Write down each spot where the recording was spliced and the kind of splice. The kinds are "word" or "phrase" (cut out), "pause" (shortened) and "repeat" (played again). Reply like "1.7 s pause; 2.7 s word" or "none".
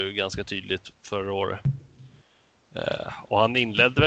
none